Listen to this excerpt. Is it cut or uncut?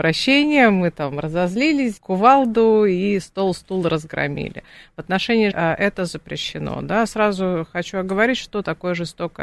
cut